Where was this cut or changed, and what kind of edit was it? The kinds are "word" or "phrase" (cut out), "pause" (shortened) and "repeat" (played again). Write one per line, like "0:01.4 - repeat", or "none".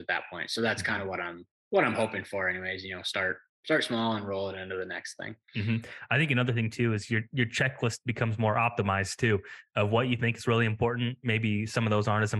0:05.4 - pause